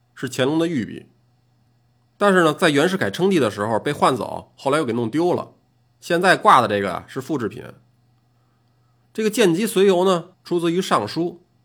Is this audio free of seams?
no; 1 cut; at 10.3 s

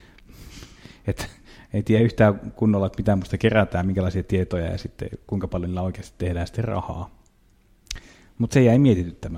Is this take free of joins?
yes; 0 cuts

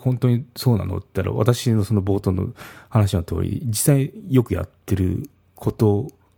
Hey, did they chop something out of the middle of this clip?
no; 0 cuts

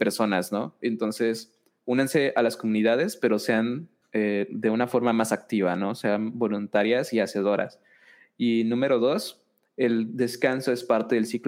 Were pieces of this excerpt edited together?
no; 0 cuts

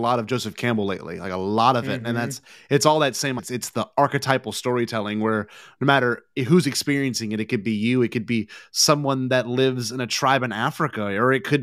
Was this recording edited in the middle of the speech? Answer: yes; 1 cut; at 3.4 s

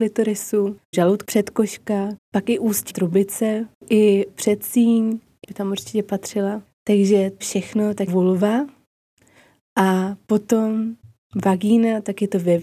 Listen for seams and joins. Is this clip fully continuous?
no; 8 cuts; at 0.9 s, 1.2 s, 2.2 s, 2.9 s, 4.3 s, 5.4 s, 7.4 s, 8.1 s

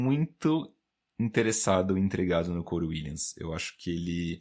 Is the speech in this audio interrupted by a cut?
no; 0 cuts

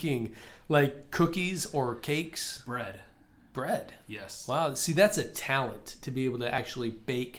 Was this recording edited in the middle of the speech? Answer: no; 0 cuts

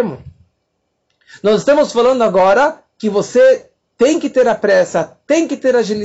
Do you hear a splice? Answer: no; 0 cuts

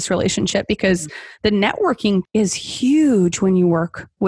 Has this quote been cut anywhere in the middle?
yes; 1 cut; at 2.2 s

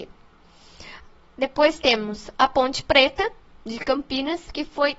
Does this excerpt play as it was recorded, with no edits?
yes; 0 cuts

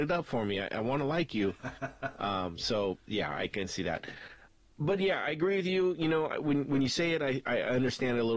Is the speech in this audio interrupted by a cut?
no; 0 cuts

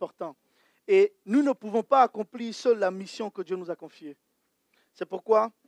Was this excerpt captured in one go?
yes; 0 cuts

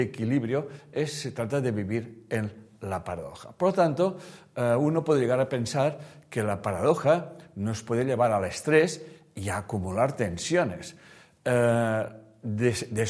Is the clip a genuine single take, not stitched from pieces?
yes; 0 cuts

